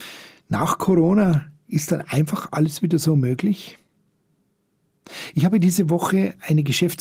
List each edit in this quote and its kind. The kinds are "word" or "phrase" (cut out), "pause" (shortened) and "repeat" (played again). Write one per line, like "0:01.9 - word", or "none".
none